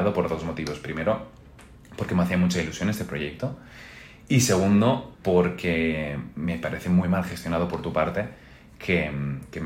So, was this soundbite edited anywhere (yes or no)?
no